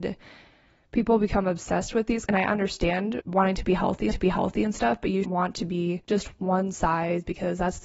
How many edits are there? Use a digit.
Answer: 5